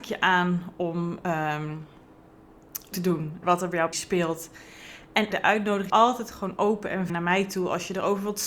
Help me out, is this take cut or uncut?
cut